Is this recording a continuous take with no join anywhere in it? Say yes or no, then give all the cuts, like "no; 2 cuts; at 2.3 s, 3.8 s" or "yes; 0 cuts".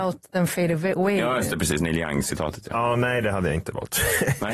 yes; 0 cuts